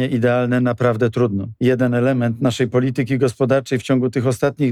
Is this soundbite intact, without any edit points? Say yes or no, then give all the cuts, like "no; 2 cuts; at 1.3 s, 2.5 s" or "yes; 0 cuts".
no; 1 cut; at 1.6 s